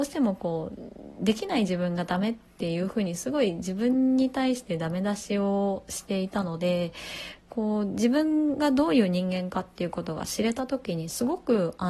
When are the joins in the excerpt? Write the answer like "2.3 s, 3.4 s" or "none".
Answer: 7.4 s

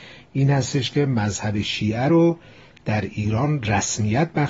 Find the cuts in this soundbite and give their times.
none

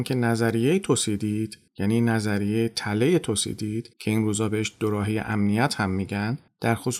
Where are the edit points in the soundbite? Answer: 3.9 s

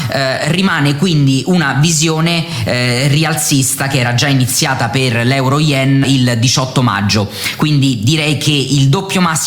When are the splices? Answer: 6.0 s

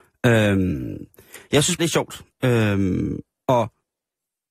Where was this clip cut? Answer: 1.8 s, 3.3 s

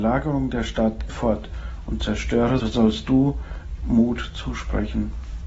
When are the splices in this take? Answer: 1.1 s, 2.6 s, 3.8 s

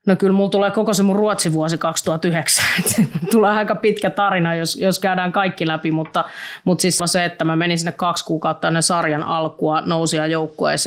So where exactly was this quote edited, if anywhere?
7.0 s

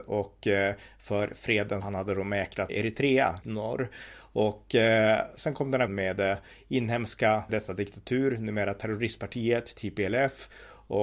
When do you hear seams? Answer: 1.8 s, 2.7 s, 3.4 s, 5.9 s, 7.5 s

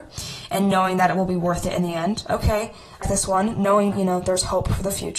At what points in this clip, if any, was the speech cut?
3.0 s, 3.9 s

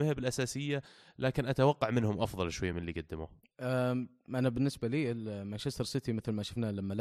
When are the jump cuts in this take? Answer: none

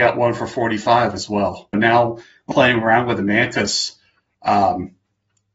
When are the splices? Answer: 1.7 s, 2.5 s

